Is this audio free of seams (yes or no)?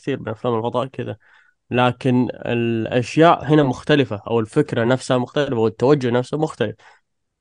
yes